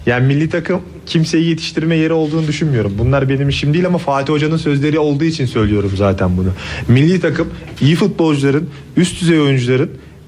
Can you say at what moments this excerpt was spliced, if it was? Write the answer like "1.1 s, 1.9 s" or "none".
none